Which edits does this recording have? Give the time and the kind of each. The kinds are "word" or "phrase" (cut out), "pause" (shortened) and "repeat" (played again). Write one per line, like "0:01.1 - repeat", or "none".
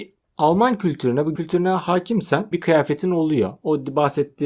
0:01.4 - word
0:02.5 - word